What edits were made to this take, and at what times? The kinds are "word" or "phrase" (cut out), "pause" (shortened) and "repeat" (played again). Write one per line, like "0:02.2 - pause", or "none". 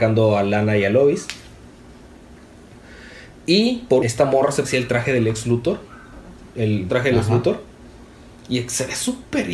0:04.0 - word
0:04.6 - word
0:06.9 - word